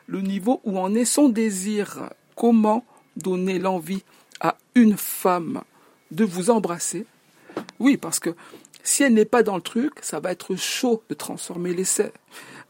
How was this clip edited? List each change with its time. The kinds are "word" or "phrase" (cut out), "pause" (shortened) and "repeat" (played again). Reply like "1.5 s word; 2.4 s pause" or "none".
none